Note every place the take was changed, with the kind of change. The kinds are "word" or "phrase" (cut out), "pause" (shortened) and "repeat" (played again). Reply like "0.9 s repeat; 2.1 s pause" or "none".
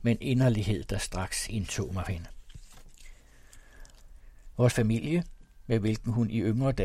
2.1 s word; 4.7 s phrase

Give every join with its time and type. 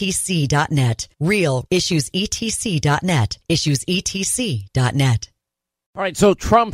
1.7 s phrase

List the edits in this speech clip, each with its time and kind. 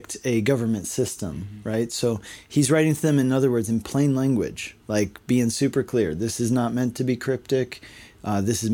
4.8 s pause

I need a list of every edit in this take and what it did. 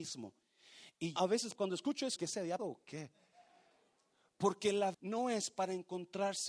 1.2 s word; 1.5 s word; 2.2 s word; 2.6 s word; 4.9 s word

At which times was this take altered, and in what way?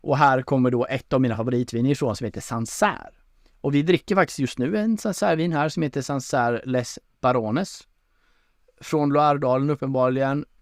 none

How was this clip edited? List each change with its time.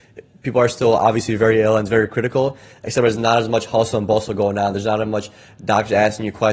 none

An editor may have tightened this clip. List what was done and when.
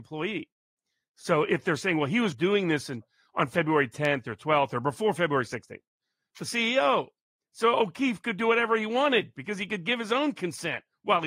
2.3 s word; 6.3 s word

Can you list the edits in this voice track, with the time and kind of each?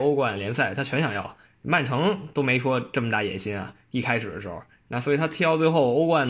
none

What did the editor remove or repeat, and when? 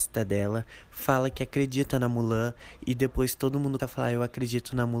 3.8 s word

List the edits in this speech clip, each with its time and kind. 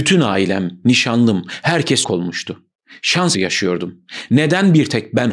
2.0 s word; 3.3 s word

